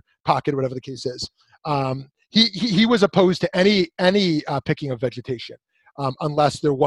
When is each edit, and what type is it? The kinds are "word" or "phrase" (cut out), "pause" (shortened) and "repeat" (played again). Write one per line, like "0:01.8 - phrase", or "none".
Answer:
none